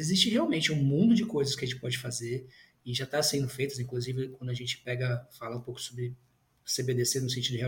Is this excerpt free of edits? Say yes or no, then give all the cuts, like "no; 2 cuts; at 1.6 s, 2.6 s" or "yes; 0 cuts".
yes; 0 cuts